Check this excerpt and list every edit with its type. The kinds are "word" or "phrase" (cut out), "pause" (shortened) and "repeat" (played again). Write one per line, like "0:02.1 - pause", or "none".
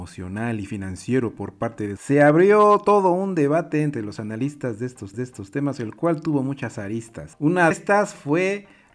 0:02.0 - phrase
0:05.1 - repeat
0:07.7 - word